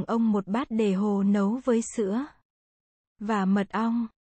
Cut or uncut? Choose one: uncut